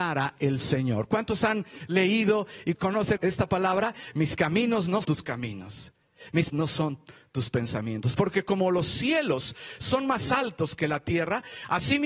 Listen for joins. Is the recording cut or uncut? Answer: cut